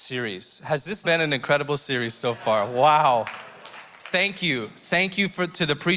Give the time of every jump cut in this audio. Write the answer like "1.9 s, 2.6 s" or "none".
1.0 s